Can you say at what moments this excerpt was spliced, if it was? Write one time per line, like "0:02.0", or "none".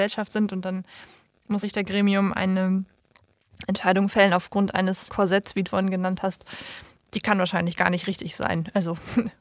0:01.6
0:05.1
0:05.7